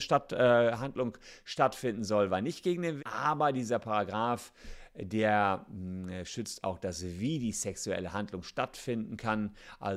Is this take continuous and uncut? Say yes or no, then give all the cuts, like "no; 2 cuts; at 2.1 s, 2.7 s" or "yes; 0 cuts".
no; 1 cut; at 3.0 s